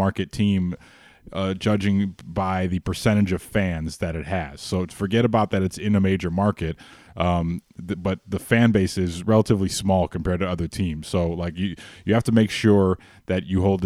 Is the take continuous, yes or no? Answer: yes